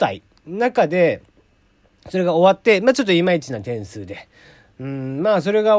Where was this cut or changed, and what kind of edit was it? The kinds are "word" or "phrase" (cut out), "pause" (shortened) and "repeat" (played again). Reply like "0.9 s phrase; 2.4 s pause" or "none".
none

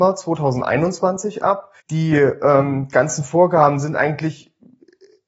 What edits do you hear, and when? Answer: 1.8 s pause

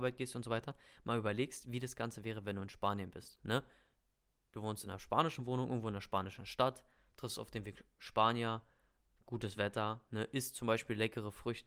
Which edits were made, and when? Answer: none

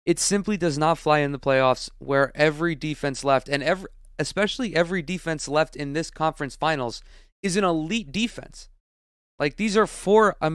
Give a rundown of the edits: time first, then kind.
none

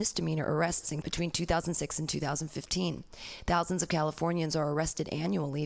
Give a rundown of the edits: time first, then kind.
1.0 s word

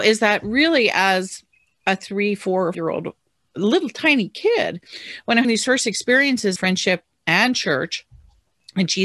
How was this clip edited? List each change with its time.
2.7 s word; 5.4 s word; 6.6 s word

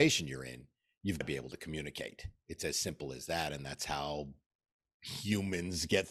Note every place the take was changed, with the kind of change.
1.2 s word

